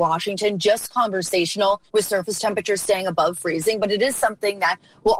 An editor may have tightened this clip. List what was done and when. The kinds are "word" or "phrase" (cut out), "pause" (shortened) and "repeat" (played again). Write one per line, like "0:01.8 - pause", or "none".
0:01.9 - pause